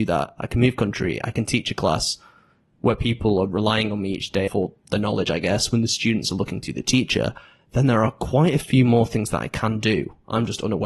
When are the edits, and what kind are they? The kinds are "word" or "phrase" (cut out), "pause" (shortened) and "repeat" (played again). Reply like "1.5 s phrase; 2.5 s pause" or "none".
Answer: none